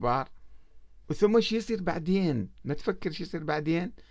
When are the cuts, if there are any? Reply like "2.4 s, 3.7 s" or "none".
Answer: 1.0 s